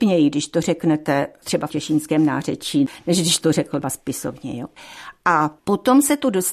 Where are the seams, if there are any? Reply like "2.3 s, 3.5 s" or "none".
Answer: 1.7 s, 3.4 s, 3.8 s, 5.6 s